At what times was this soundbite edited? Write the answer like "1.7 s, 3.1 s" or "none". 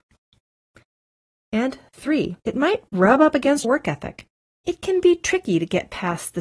2.4 s, 3.6 s